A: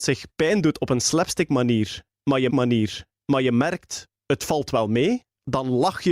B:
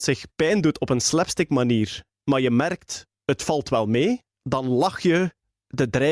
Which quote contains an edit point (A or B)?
A